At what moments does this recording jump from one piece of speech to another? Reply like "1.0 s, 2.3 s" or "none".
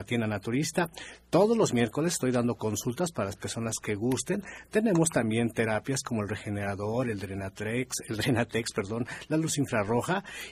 none